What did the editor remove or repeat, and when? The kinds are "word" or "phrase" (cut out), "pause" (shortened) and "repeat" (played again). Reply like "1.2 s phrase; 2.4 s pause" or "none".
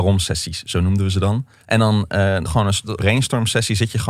1.6 s pause; 2.5 s phrase; 3.0 s phrase